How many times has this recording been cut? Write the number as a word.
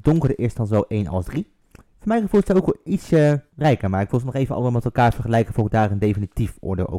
zero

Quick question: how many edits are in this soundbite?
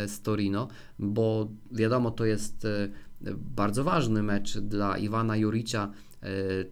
zero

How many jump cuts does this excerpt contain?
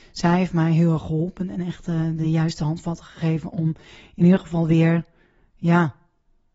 zero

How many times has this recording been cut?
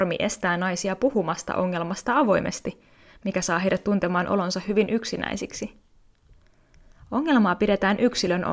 zero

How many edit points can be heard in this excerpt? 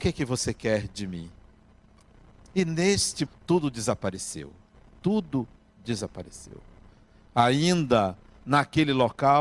one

